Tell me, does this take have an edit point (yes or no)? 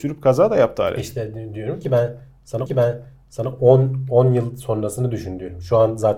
yes